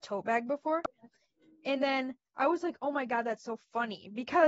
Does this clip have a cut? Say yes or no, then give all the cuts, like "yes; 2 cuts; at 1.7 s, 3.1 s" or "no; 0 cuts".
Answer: no; 0 cuts